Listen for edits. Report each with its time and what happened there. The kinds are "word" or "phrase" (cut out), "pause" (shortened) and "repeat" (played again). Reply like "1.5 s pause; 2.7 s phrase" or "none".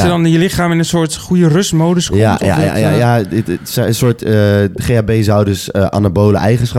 none